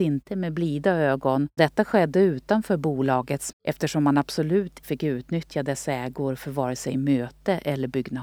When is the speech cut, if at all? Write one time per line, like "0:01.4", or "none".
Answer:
0:01.6
0:03.5
0:04.8